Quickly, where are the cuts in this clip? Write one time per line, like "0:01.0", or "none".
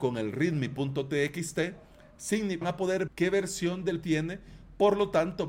0:02.6
0:03.1
0:04.0